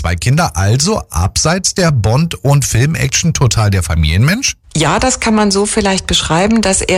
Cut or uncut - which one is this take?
uncut